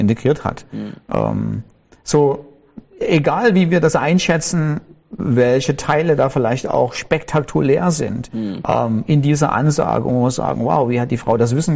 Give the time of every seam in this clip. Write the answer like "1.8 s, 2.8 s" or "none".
none